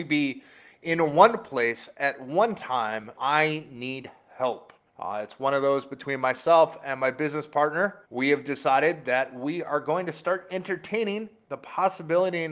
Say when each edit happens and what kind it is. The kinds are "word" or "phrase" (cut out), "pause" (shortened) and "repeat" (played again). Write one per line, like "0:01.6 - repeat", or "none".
0:03.2 - word
0:04.9 - pause
0:08.0 - pause